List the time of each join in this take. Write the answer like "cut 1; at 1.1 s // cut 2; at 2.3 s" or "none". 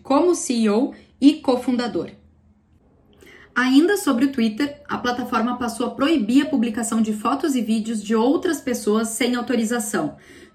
none